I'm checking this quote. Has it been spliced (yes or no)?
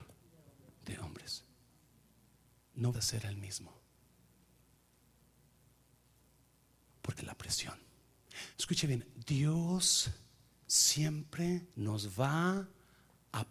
yes